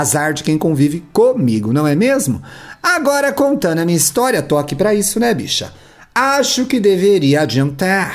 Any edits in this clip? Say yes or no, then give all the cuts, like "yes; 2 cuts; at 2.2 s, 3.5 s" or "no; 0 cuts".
no; 0 cuts